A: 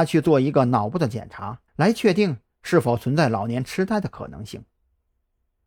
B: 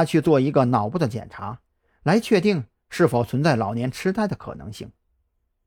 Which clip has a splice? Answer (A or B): A